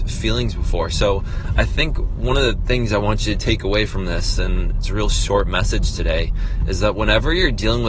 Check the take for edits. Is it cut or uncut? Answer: uncut